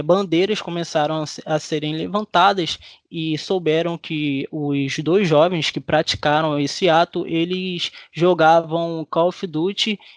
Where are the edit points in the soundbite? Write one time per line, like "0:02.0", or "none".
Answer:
none